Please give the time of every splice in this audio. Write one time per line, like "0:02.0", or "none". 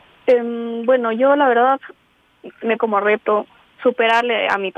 0:02.8
0:03.6